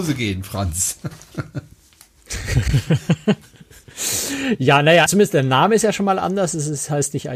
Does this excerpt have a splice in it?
yes; 1 cut; at 5.1 s

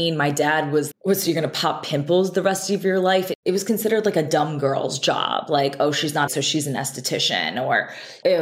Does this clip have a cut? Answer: yes; 2 cuts; at 0.9 s, 6.3 s

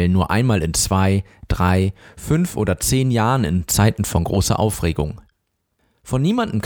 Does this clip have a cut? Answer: no; 0 cuts

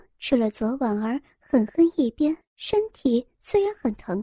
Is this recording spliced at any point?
yes; 1 cut; at 2.4 s

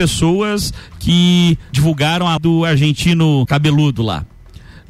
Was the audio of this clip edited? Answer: yes; 3 cuts; at 1.7 s, 2.4 s, 3.5 s

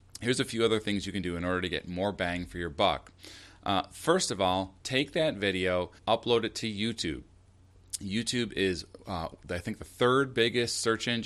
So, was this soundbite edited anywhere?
yes; 2 cuts; at 4.8 s, 6.0 s

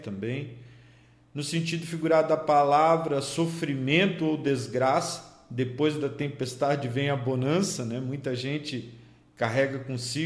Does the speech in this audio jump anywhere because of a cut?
no; 0 cuts

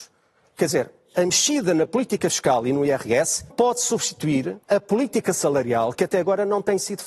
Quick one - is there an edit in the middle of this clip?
yes; 2 cuts; at 3.5 s, 4.6 s

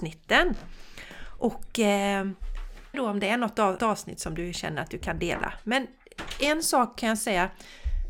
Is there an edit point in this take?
yes; 2 cuts; at 2.9 s, 3.8 s

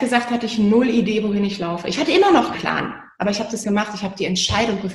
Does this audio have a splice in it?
yes; 2 cuts; at 2.5 s, 3.6 s

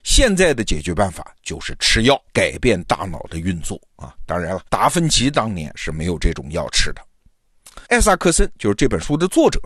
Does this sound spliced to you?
yes; 3 cuts; at 2.3 s, 4.7 s, 7.9 s

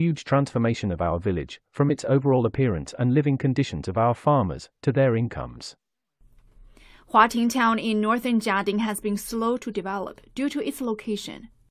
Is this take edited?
no; 0 cuts

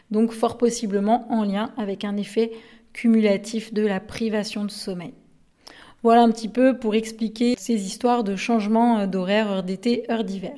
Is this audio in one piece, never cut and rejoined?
yes; 0 cuts

